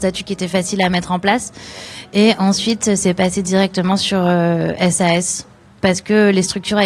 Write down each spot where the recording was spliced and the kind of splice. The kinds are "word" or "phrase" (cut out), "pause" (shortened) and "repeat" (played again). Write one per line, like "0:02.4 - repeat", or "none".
none